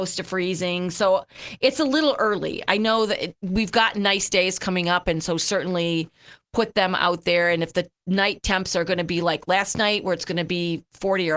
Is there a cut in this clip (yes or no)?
yes